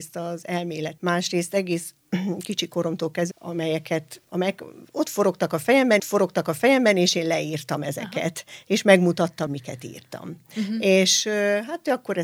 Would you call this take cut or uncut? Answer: cut